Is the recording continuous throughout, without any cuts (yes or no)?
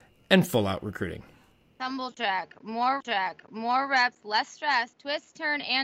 no